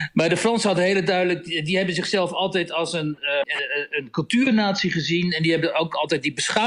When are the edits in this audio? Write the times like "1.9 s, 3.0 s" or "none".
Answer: 3.4 s